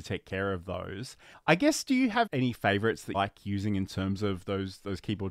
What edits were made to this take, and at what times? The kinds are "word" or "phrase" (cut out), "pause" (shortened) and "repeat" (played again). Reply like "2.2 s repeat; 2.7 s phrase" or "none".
1.3 s pause; 2.3 s word; 3.1 s word